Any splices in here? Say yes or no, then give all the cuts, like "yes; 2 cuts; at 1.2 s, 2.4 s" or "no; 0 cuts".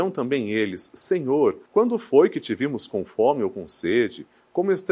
yes; 1 cut; at 1.7 s